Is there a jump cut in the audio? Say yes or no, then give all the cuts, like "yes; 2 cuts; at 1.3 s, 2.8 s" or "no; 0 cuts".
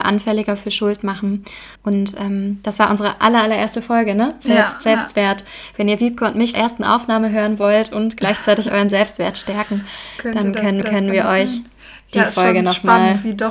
yes; 3 cuts; at 1.8 s, 6.5 s, 10.8 s